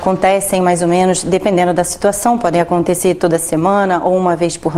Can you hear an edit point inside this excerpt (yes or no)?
no